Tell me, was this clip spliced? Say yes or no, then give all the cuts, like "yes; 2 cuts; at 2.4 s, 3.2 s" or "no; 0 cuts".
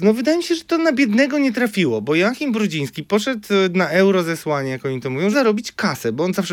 yes; 1 cut; at 5.3 s